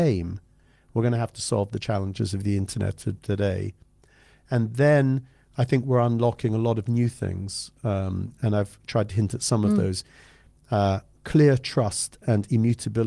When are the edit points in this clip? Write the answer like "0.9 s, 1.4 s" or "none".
none